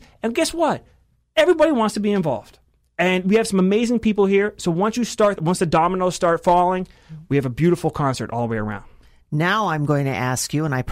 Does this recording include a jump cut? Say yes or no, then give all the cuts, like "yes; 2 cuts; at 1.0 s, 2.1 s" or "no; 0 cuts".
yes; 1 cut; at 5.4 s